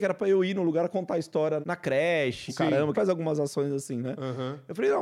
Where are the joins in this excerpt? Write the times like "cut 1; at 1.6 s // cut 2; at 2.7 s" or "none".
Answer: cut 1; at 1.6 s // cut 2; at 2.5 s // cut 3; at 2.9 s